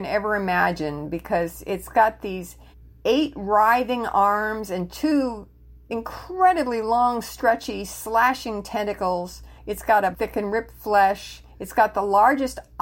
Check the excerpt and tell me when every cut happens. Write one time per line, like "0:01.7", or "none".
0:02.7
0:09.6
0:10.1
0:11.5